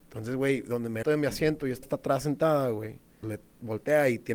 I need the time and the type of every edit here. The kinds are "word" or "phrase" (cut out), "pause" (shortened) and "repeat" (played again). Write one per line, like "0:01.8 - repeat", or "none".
0:01.0 - word
0:01.8 - word
0:03.2 - word